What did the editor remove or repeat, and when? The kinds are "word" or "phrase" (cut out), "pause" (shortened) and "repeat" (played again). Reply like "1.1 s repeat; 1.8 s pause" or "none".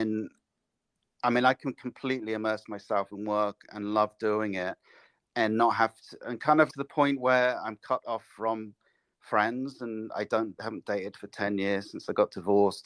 6.7 s word; 10.6 s word